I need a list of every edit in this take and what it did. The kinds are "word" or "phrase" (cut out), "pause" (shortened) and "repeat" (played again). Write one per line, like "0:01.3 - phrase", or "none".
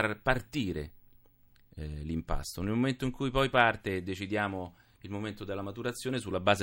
none